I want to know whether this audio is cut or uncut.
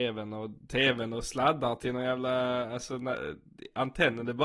uncut